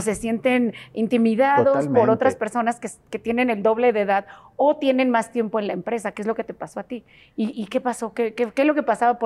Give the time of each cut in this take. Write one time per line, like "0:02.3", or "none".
none